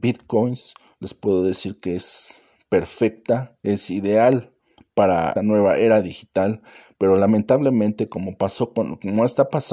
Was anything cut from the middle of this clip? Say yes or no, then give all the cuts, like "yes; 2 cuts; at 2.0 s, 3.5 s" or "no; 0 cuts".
yes; 1 cut; at 5.4 s